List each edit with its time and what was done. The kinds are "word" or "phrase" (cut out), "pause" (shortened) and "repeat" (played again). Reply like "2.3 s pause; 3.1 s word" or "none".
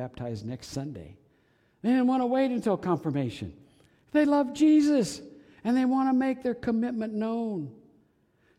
none